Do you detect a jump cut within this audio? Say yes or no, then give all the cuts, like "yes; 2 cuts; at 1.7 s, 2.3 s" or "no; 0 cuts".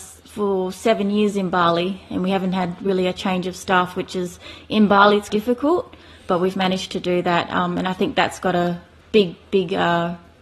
yes; 1 cut; at 5.3 s